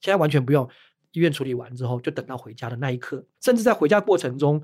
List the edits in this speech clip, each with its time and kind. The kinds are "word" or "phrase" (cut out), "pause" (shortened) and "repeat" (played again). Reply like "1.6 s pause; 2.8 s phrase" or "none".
3.3 s pause